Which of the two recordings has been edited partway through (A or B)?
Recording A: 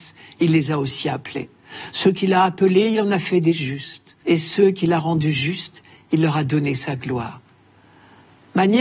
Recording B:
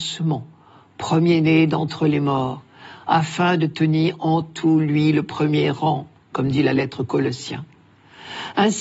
A